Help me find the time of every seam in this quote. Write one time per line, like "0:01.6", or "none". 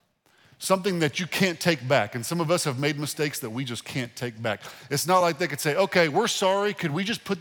none